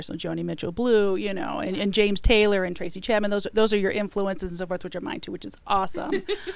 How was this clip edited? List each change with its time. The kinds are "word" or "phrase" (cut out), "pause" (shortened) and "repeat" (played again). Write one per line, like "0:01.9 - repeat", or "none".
none